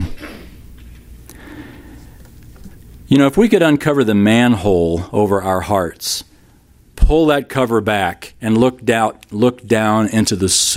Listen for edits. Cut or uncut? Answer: cut